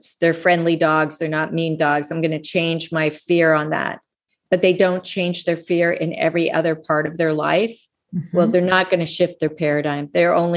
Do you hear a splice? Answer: no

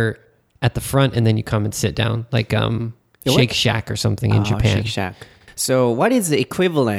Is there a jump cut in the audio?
no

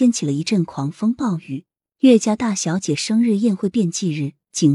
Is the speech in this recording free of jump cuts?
yes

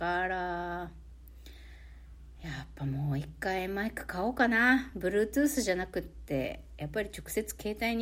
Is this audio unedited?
yes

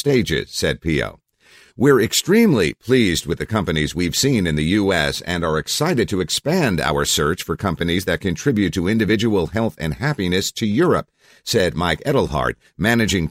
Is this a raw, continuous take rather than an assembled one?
yes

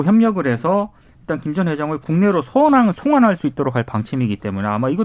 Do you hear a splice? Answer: no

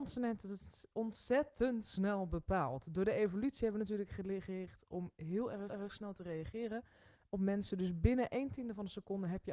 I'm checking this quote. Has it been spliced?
yes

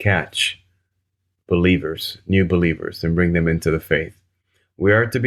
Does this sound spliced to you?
no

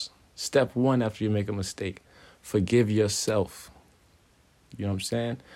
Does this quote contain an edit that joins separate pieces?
no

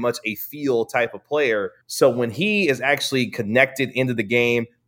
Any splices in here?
yes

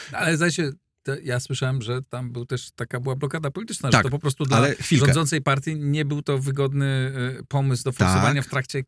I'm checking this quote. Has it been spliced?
no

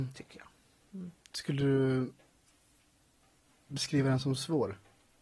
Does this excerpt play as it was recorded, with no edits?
yes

